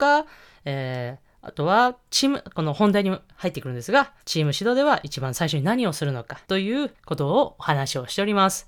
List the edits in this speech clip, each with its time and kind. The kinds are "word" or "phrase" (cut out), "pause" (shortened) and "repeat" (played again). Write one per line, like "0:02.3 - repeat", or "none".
0:04.2 - pause
0:06.4 - pause
0:06.9 - pause